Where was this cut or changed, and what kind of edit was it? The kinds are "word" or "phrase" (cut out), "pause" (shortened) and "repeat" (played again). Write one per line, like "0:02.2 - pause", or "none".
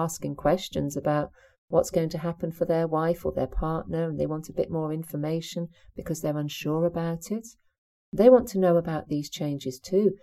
none